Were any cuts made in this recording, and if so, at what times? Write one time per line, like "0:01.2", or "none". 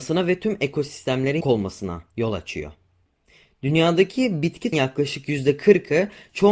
0:01.4
0:04.7